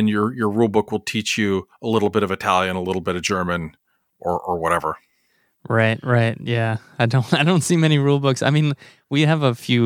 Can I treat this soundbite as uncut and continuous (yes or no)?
yes